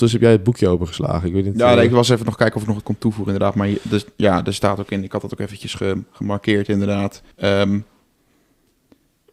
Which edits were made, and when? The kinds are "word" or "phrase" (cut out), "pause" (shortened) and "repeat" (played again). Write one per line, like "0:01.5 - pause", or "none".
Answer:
0:07.3 - pause